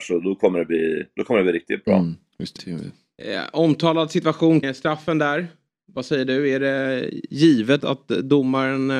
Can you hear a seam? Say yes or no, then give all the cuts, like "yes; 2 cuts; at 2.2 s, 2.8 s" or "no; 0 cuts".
yes; 3 cuts; at 2.6 s, 4.6 s, 7.8 s